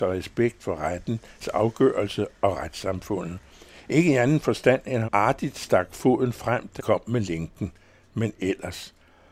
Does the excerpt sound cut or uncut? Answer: cut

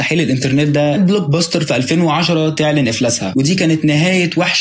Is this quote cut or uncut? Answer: cut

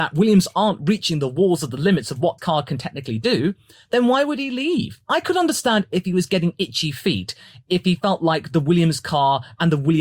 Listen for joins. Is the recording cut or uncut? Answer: cut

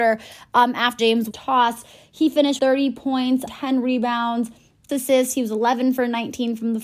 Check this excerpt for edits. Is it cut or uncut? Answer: cut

